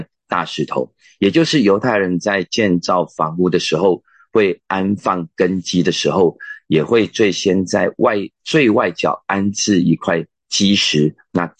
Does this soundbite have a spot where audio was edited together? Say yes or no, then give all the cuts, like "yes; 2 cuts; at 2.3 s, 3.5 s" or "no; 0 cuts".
no; 0 cuts